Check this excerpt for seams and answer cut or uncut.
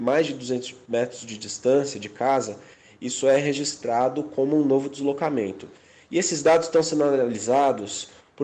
uncut